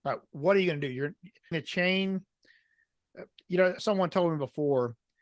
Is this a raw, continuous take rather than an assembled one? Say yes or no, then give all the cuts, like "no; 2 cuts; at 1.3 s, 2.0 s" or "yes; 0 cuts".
no; 2 cuts; at 1.5 s, 3.8 s